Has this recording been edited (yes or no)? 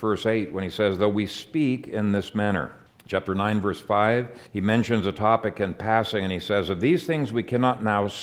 yes